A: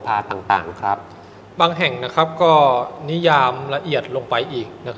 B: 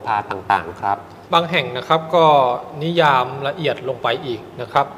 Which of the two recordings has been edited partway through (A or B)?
B